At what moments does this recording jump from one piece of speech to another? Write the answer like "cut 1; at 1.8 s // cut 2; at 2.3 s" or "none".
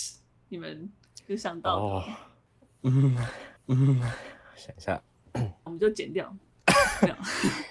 cut 1; at 3.6 s // cut 2; at 5.7 s